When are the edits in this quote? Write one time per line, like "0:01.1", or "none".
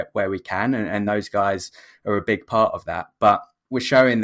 none